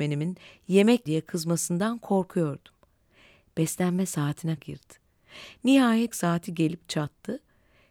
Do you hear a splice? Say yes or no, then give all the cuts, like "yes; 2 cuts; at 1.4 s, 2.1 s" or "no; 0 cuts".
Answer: yes; 3 cuts; at 1.1 s, 4.6 s, 6.1 s